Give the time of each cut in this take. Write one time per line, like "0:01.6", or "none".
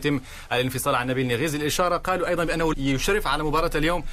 0:02.7